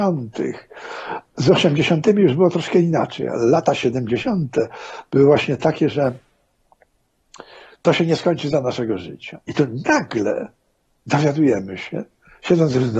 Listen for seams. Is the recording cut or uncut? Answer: uncut